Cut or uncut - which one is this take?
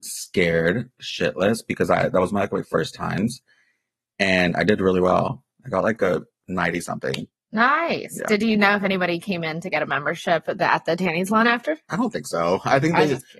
uncut